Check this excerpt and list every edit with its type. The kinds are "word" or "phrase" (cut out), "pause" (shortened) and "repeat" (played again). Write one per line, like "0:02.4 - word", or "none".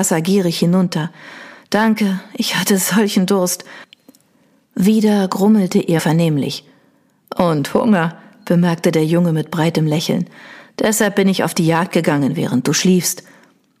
0:06.0 - word